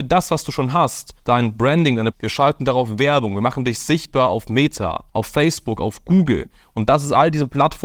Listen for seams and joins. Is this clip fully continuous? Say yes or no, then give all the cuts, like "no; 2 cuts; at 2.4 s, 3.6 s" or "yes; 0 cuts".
no; 3 cuts; at 1.2 s, 2.1 s, 5.1 s